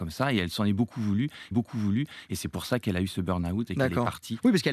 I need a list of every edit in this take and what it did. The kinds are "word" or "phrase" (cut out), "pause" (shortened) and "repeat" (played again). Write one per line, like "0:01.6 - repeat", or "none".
0:01.5 - repeat